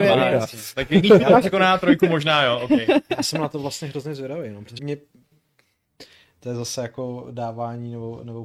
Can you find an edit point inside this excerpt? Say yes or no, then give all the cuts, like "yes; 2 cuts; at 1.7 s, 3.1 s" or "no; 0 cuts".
yes; 1 cut; at 4.8 s